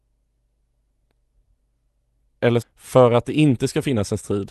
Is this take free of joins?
no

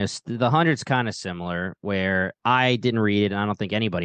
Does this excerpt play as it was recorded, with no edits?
yes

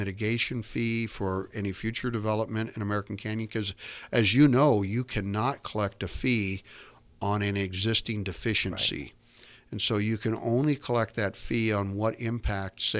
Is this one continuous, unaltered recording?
yes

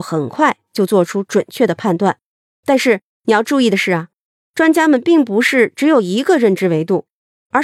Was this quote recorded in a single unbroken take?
yes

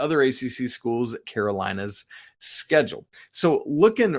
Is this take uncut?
no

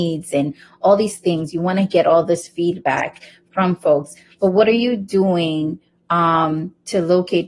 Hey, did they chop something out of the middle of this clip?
no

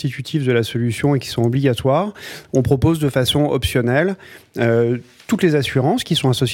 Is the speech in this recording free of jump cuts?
yes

